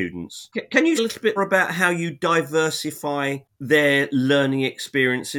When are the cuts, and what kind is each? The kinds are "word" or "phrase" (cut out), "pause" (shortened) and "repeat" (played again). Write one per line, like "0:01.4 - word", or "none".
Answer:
0:01.0 - word
0:01.4 - word